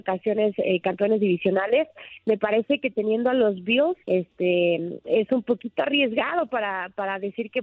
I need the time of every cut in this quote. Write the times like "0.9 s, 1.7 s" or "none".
4.0 s